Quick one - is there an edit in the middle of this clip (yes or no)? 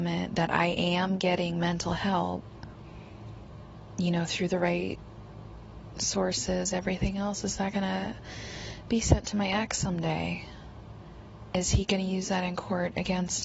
no